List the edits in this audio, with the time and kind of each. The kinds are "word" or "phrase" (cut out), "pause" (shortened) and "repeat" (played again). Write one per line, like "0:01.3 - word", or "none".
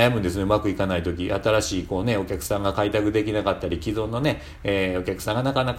none